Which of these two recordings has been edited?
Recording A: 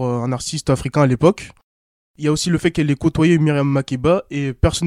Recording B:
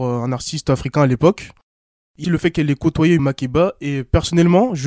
B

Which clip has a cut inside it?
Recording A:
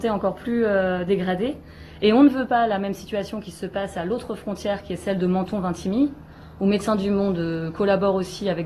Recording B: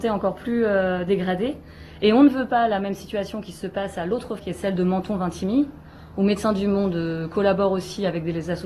B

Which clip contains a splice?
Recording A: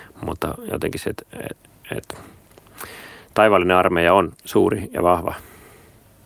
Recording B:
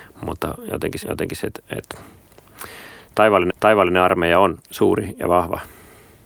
B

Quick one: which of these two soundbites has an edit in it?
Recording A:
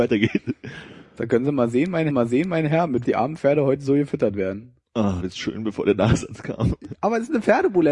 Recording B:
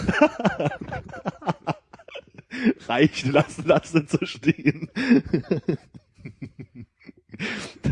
A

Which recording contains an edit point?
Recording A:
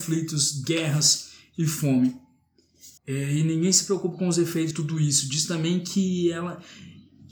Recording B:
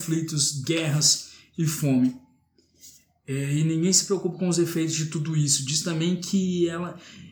A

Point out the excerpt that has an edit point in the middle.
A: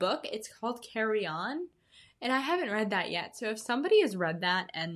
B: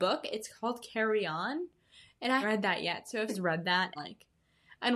B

